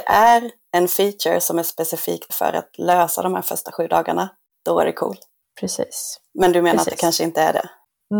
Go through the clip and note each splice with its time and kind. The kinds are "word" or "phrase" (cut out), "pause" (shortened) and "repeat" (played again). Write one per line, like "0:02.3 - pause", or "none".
0:02.3 - word